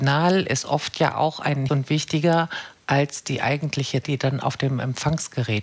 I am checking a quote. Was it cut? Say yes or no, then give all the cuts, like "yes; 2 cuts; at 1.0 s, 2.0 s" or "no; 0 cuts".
yes; 2 cuts; at 1.7 s, 4.0 s